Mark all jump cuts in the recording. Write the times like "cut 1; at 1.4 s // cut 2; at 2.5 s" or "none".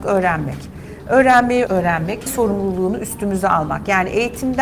cut 1; at 1.7 s // cut 2; at 2.3 s

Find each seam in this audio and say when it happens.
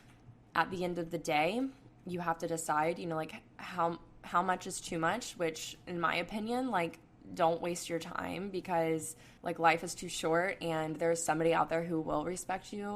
cut 1; at 9.4 s

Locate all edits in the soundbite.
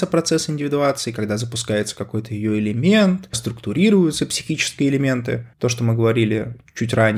cut 1; at 3.3 s // cut 2; at 5.5 s

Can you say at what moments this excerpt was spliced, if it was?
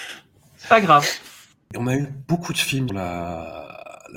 cut 1; at 2.9 s

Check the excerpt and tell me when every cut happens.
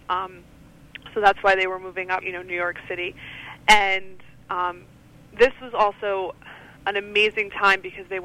cut 1; at 2.2 s // cut 2; at 6.8 s

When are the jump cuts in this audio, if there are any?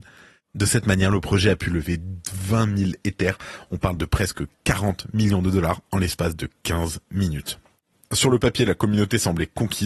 none

